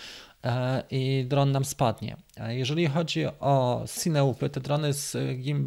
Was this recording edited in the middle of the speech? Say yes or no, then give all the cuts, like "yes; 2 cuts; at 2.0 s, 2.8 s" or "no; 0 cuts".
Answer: yes; 1 cut; at 4.0 s